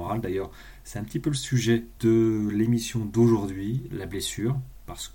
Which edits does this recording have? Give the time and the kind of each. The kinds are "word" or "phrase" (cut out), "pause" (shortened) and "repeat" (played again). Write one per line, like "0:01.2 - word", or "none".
0:02.0 - word
0:03.9 - word